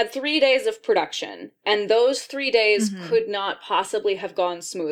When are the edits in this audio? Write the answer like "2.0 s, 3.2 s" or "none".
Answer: none